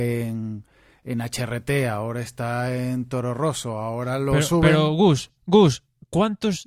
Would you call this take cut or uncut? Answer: uncut